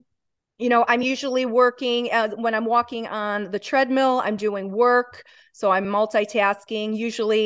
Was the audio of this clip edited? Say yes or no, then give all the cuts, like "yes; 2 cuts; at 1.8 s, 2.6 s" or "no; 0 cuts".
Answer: no; 0 cuts